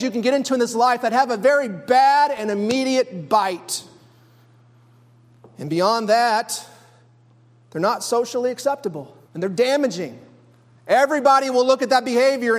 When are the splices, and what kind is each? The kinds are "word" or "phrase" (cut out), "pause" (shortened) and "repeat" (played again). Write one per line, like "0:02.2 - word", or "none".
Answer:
0:09.3 - pause